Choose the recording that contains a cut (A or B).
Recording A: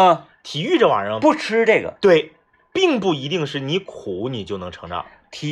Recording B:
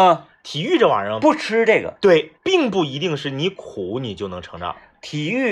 B